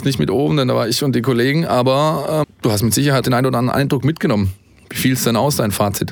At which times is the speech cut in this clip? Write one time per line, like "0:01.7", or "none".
0:02.4
0:03.2